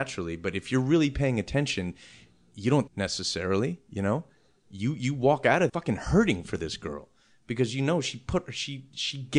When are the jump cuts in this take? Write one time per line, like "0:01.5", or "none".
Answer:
0:02.9
0:05.7